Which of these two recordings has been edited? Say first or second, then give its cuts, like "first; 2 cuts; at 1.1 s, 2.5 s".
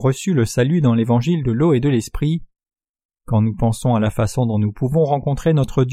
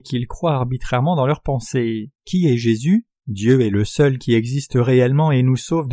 second; 2 cuts; at 2.2 s, 3.2 s